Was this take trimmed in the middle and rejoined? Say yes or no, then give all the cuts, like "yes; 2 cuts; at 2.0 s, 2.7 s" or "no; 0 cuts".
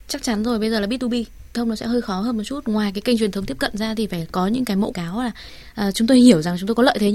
yes; 2 cuts; at 1.5 s, 4.9 s